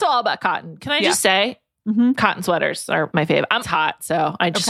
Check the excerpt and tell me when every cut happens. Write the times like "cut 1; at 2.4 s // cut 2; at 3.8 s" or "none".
cut 1; at 3.1 s // cut 2; at 3.6 s